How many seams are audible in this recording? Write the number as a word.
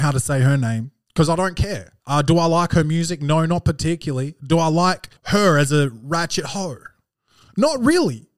two